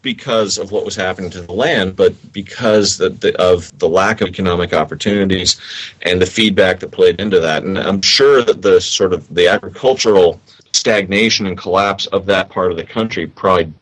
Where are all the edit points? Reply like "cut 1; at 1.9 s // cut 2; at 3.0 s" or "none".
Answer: cut 1; at 4.3 s